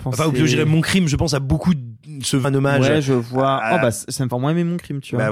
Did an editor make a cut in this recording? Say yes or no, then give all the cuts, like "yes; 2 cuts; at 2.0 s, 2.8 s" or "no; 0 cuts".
yes; 2 cuts; at 2.4 s, 4.3 s